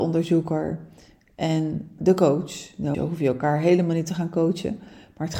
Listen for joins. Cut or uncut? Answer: cut